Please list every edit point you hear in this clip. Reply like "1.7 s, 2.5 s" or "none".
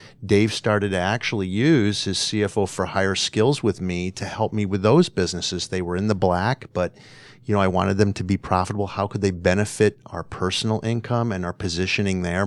none

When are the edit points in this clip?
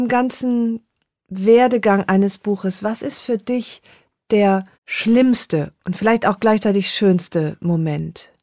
4.7 s

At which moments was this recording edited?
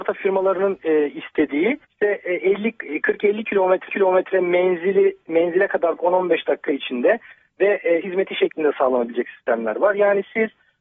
1.8 s, 3.9 s, 6.0 s, 8.0 s

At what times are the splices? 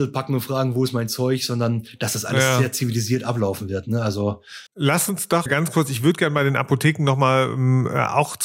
4.7 s, 5.5 s

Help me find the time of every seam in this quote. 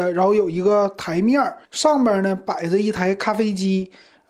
1.7 s

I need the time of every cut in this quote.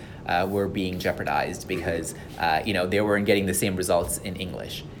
none

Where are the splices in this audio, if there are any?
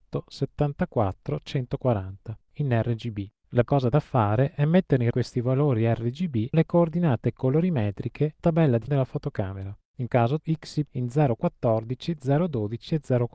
2.5 s, 3.7 s, 5.1 s, 6.5 s, 8.4 s, 8.9 s, 10.1 s, 10.4 s, 10.9 s

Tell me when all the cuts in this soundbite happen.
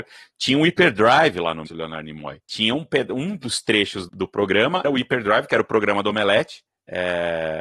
1.7 s, 2.4 s, 4.1 s, 4.8 s

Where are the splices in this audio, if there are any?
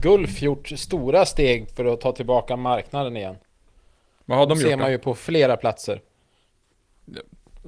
none

